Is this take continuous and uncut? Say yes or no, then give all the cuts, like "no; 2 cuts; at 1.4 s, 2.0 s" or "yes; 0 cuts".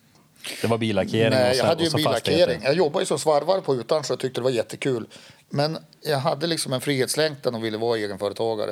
yes; 0 cuts